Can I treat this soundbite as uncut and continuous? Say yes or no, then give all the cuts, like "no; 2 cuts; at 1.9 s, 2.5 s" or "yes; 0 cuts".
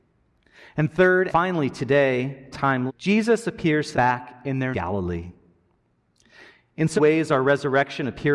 no; 6 cuts; at 1.3 s, 2.5 s, 2.9 s, 3.9 s, 4.7 s, 7.0 s